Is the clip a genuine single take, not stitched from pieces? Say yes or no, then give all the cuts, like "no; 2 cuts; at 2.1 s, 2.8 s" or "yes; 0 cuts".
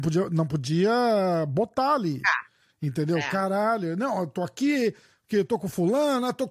yes; 0 cuts